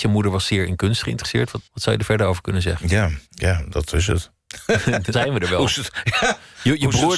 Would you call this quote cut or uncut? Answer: cut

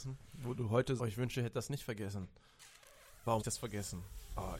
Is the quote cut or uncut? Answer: cut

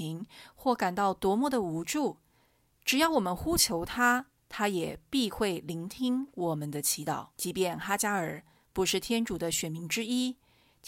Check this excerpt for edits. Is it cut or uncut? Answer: cut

